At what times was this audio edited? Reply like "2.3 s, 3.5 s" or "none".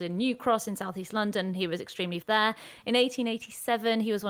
2.2 s